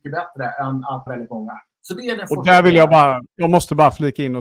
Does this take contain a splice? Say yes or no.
yes